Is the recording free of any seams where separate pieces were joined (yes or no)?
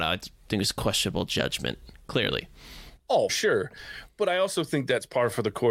no